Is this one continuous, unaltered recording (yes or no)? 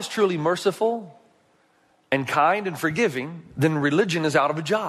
yes